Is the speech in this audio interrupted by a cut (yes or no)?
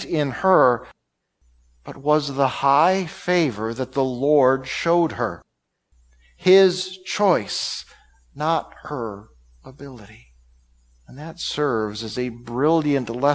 no